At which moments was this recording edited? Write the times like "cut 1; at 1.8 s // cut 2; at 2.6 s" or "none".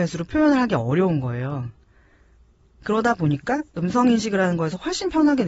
none